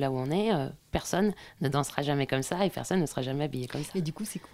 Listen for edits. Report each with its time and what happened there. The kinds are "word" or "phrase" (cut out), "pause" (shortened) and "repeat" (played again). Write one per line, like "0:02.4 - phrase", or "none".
none